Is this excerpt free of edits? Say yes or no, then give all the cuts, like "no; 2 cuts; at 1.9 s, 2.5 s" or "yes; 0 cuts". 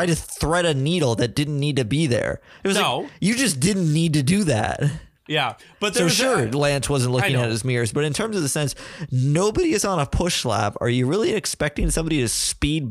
yes; 0 cuts